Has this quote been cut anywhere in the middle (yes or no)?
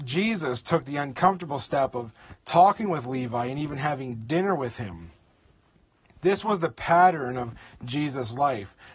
no